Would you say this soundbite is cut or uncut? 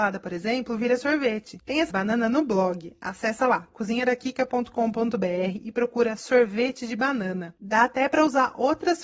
cut